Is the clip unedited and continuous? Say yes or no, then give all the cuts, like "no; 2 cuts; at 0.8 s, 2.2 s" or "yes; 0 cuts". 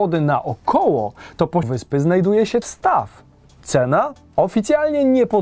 no; 2 cuts; at 1.6 s, 2.6 s